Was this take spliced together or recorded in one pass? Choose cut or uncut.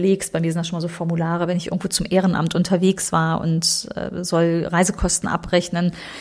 uncut